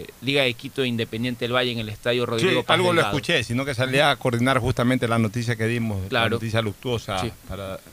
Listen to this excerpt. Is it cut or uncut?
uncut